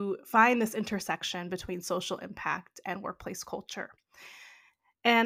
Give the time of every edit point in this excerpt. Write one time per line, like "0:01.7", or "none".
none